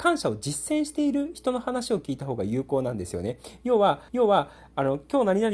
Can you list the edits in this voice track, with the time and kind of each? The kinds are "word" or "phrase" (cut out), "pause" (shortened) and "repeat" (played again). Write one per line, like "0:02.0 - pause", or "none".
0:04.1 - repeat